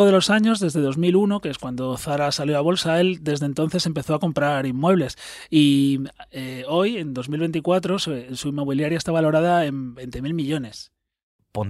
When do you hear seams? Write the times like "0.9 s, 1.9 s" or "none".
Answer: none